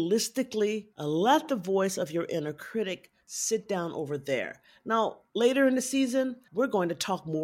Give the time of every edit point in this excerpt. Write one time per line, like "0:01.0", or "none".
0:00.9
0:06.5

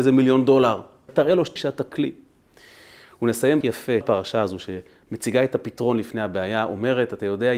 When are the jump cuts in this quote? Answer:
0:01.1
0:01.6
0:03.6
0:04.0

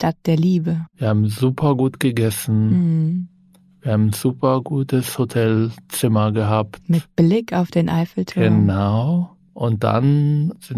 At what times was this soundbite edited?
0:00.9

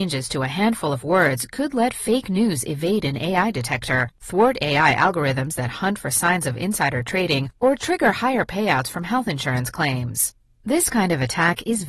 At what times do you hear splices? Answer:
none

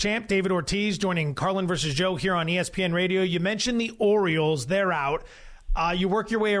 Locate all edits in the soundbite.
none

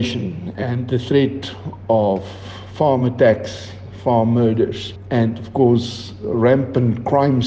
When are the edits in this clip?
none

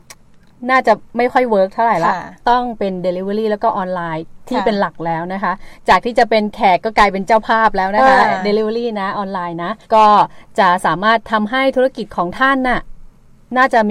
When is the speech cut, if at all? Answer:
0:09.8

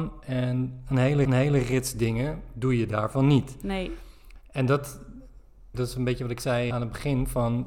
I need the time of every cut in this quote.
0:01.2
0:05.7
0:06.7

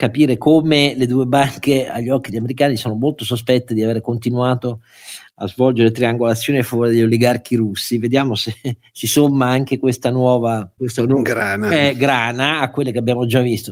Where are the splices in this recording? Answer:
0:10.8

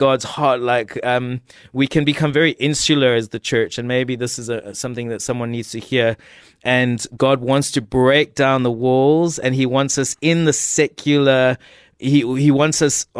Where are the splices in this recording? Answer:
none

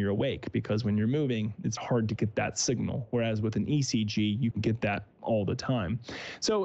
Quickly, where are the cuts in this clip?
0:01.8
0:04.5

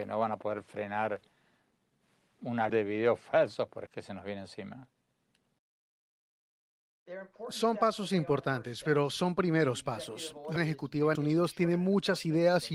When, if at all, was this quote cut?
0:02.7
0:03.9
0:10.6
0:11.1

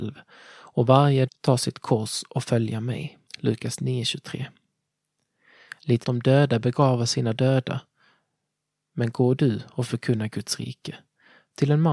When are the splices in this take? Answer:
0:01.3
0:03.3
0:06.0

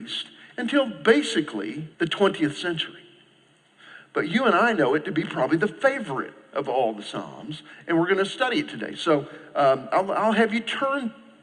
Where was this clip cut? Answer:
0:01.9

